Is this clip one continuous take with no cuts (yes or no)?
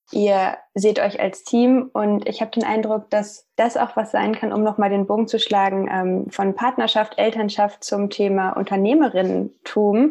yes